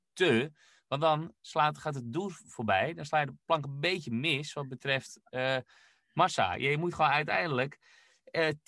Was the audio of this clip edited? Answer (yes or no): no